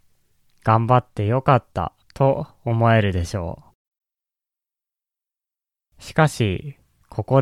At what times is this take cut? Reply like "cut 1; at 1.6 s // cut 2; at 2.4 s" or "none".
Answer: cut 1; at 2.0 s // cut 2; at 3.7 s